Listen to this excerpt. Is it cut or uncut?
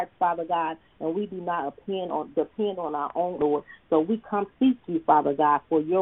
cut